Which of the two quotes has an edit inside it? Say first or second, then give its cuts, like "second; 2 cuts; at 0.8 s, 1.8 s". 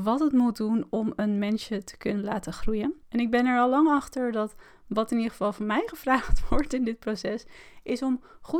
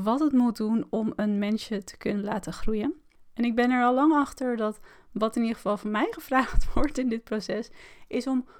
first; 1 cut; at 3.0 s